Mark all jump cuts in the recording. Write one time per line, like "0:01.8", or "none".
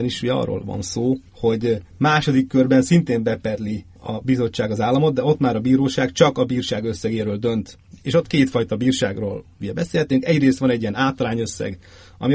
0:01.3
0:03.9